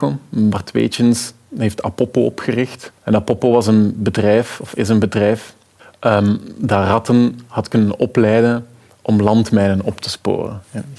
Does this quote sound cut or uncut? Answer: cut